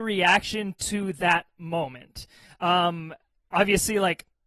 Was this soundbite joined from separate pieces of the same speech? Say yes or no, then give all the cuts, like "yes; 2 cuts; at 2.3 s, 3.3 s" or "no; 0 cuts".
no; 0 cuts